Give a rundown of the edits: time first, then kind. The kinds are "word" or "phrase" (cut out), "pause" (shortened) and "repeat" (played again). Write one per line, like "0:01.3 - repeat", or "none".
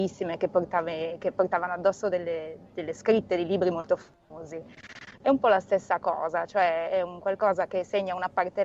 none